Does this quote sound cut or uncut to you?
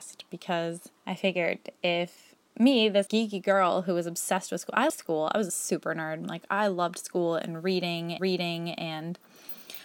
cut